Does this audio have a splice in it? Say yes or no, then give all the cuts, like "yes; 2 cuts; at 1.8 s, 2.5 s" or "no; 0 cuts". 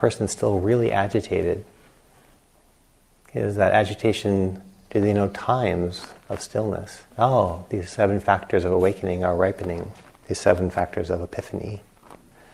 yes; 1 cut; at 7.1 s